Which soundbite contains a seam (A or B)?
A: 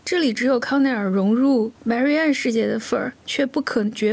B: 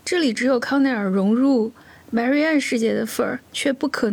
A